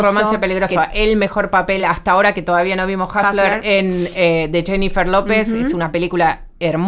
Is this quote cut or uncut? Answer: uncut